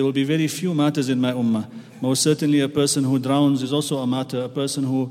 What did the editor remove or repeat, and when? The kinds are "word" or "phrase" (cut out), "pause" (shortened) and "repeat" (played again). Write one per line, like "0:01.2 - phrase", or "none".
none